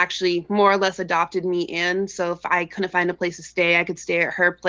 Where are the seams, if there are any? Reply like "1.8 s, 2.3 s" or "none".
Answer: none